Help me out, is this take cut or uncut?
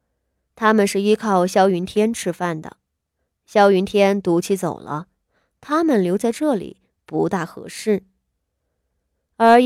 uncut